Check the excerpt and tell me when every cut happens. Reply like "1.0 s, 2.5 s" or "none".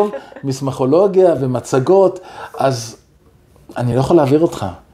none